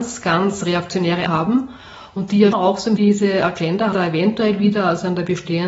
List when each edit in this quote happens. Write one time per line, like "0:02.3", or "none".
0:01.3
0:02.5
0:03.0
0:03.9